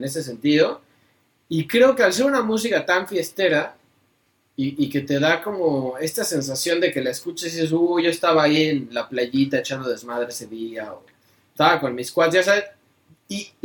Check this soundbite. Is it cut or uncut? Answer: uncut